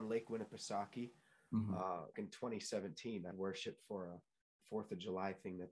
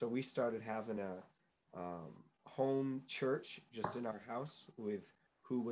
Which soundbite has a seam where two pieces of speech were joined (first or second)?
first